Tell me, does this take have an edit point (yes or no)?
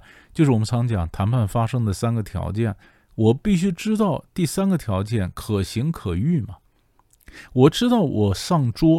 no